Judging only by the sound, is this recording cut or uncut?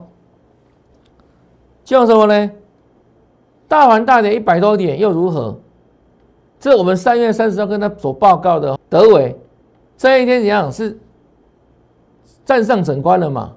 cut